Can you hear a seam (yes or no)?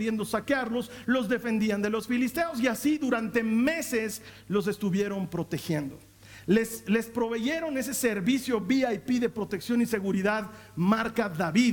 no